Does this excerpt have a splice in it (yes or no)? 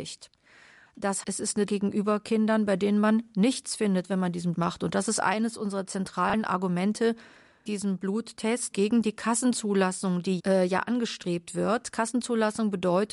yes